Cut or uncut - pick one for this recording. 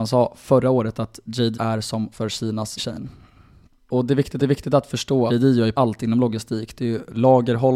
cut